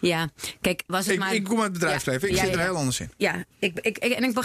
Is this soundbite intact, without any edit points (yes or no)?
yes